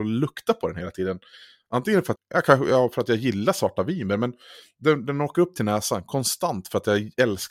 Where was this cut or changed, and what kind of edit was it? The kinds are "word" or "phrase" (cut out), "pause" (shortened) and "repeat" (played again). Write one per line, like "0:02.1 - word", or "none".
0:02.2 - word

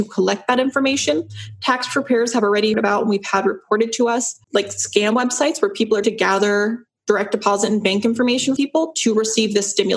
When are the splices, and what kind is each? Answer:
0:02.7 - word
0:04.4 - pause
0:06.0 - word
0:08.6 - word

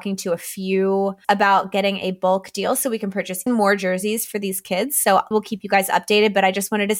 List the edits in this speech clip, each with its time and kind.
0:01.2 - word
0:03.5 - word
0:05.3 - word

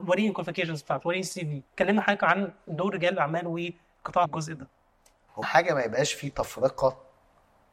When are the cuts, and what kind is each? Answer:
0:01.7 - pause
0:04.2 - phrase
0:05.4 - word

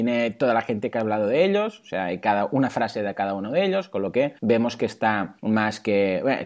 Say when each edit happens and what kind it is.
0:04.4 - pause
0:05.4 - pause

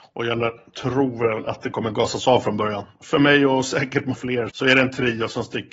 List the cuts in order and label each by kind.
0:04.1 - word
0:04.5 - word

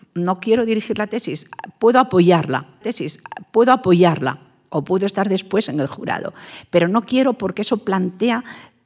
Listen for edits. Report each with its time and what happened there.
0:02.8 - repeat

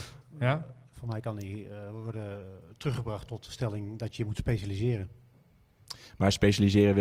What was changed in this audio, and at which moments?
none

